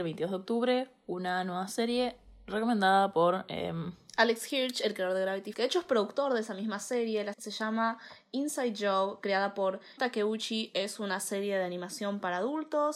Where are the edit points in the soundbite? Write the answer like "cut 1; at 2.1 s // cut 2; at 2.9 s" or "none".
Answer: cut 1; at 5.5 s // cut 2; at 7.3 s // cut 3; at 10.0 s